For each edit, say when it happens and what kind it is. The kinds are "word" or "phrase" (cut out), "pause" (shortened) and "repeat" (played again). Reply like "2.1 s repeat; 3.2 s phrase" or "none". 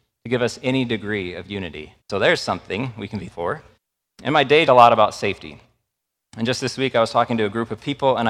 2.0 s pause; 3.3 s word; 3.8 s pause; 4.7 s phrase